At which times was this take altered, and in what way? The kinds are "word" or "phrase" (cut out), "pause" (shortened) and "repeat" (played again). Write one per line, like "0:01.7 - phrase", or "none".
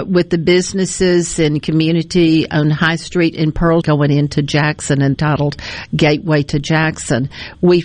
0:03.8 - word
0:05.1 - phrase